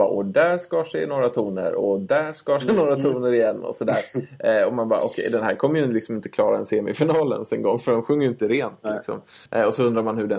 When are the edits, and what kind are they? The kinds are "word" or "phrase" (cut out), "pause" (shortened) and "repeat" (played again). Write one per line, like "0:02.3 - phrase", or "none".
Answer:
0:09.5 - pause